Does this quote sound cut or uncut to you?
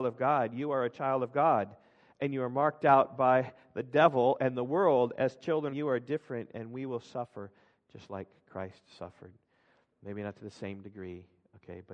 cut